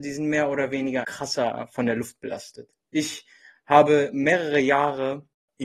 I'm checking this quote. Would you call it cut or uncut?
cut